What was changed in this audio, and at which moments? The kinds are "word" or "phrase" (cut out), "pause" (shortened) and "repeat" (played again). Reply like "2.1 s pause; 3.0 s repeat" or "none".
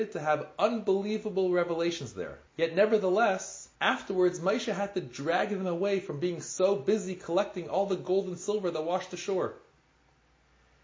2.5 s pause; 3.7 s pause